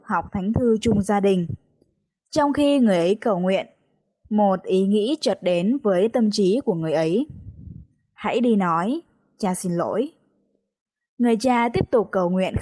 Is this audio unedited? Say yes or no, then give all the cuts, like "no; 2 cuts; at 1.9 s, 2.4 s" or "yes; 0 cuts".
yes; 0 cuts